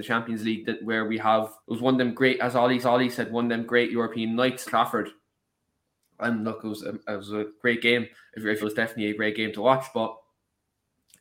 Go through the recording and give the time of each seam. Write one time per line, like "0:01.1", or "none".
0:01.6
0:02.8
0:04.7
0:08.1
0:08.6